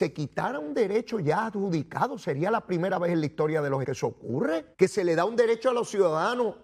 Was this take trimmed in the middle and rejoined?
yes; 2 cuts; at 3.8 s, 4.7 s

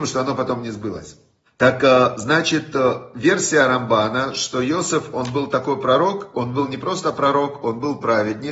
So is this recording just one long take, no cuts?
no; 1 cut; at 1.5 s

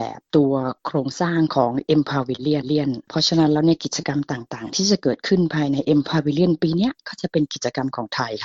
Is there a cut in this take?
yes; 1 cut; at 2.6 s

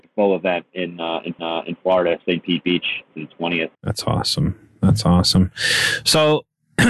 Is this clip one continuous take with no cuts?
no; 3 cuts; at 1.4 s, 3.1 s, 3.7 s

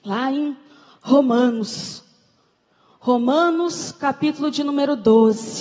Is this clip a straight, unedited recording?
yes; 0 cuts

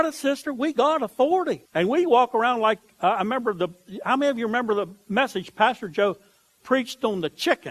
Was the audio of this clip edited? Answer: yes; 1 cut; at 1.6 s

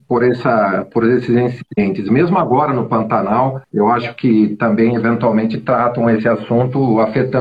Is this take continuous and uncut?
no; 1 cut; at 3.6 s

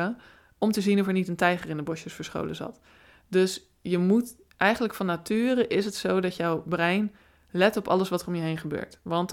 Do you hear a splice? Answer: no; 0 cuts

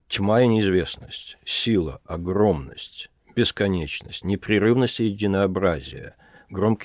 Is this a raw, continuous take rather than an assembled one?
yes; 0 cuts

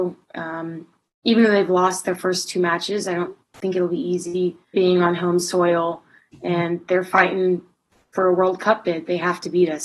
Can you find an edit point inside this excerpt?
yes; 1 cut; at 4.7 s

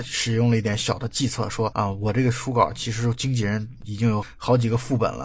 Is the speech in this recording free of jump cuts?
no; 1 cut; at 1.7 s

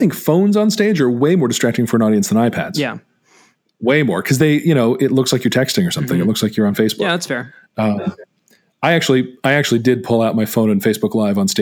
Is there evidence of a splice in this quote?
no; 0 cuts

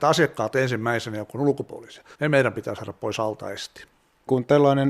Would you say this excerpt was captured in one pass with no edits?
no; 1 cut; at 2.1 s

